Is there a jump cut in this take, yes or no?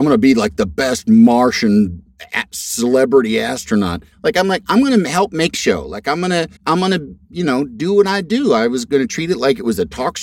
yes